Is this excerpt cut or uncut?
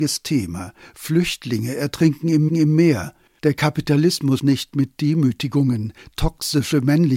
cut